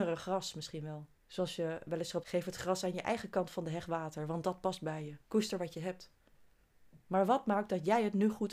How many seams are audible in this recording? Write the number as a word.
three